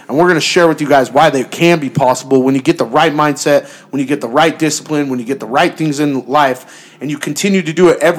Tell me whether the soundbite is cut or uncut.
uncut